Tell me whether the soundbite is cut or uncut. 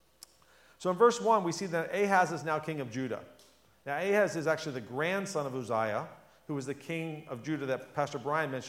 uncut